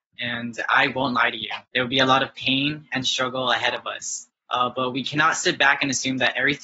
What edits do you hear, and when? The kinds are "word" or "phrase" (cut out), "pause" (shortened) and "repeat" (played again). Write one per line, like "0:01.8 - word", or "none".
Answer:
0:01.7 - pause
0:04.3 - pause